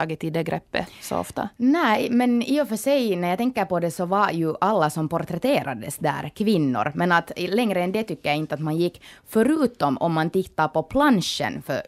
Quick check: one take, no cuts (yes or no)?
yes